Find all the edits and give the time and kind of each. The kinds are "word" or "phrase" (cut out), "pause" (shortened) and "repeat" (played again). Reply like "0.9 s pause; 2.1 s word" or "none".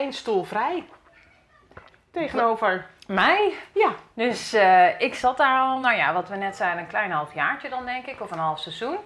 none